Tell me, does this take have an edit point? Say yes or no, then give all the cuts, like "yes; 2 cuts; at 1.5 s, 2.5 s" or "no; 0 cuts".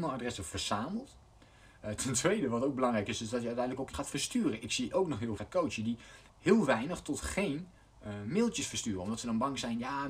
yes; 3 cuts; at 3.9 s, 5.4 s, 6.3 s